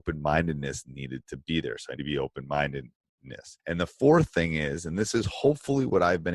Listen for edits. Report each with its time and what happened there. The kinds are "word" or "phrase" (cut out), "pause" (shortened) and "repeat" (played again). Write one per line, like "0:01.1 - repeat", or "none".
0:02.0 - word
0:03.6 - pause